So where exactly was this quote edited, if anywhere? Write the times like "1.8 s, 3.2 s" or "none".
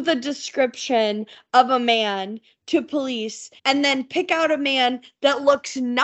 3.6 s